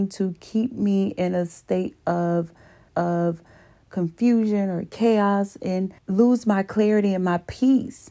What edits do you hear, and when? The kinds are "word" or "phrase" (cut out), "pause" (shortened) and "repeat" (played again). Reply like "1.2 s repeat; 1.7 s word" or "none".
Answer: 2.9 s repeat; 6.0 s pause